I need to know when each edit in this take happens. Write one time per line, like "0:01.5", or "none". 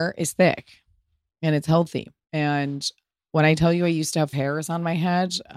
0:02.2
0:04.3

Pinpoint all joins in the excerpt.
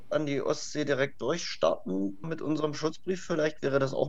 0:02.2

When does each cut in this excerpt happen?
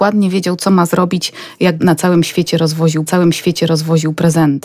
0:01.8
0:03.1

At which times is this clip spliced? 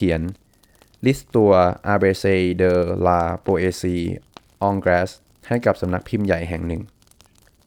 none

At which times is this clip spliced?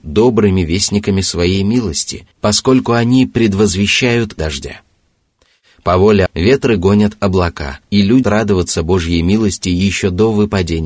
0:02.3
0:04.4
0:06.3
0:07.8
0:08.2

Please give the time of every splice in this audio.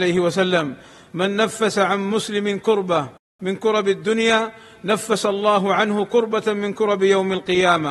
none

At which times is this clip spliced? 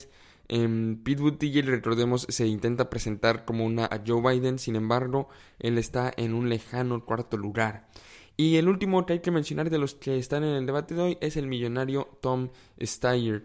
0:03.9

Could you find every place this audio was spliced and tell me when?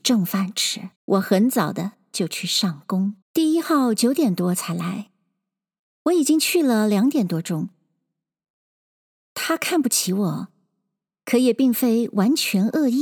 0:01.0
0:03.2

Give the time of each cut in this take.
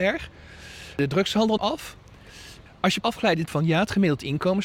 0:01.6
0:03.0
0:03.5

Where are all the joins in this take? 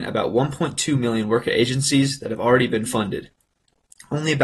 0:02.9

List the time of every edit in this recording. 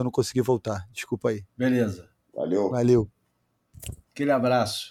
0:01.5

